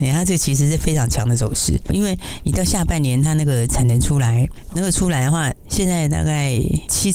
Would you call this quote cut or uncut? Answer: cut